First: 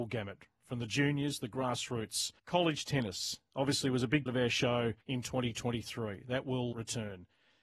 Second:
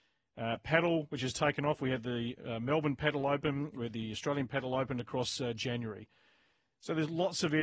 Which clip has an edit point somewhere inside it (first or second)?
first